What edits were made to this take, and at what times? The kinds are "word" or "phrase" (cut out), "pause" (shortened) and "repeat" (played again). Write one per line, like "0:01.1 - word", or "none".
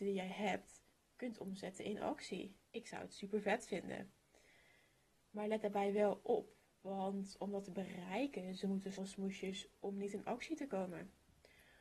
0:00.9 - pause
0:02.7 - pause
0:08.6 - word
0:08.9 - phrase

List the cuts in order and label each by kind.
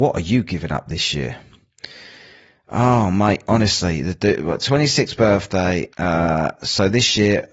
0:05.9 - pause

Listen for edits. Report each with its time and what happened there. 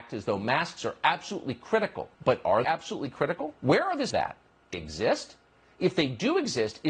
0:02.1 - pause
0:02.6 - word
0:03.6 - pause
0:04.1 - phrase
0:04.7 - word

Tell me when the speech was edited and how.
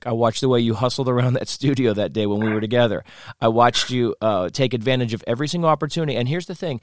none

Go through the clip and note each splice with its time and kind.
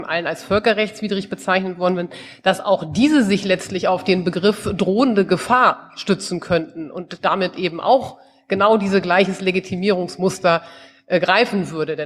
none

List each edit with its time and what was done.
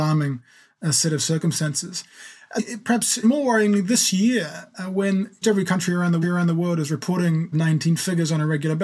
0:02.6 - word
0:03.2 - word
0:05.4 - word
0:06.2 - repeat
0:07.5 - word

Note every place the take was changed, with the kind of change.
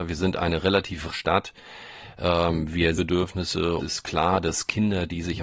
0:01.1 - phrase
0:03.0 - phrase
0:03.8 - phrase

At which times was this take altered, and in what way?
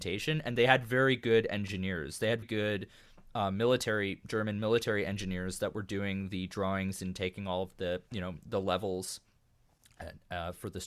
0:02.4 - word

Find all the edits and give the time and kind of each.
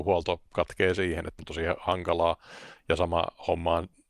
0:01.4 - word

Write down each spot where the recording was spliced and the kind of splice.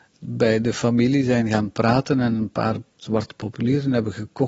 none

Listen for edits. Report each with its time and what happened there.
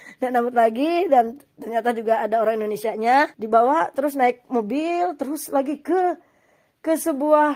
0:03.3 - pause

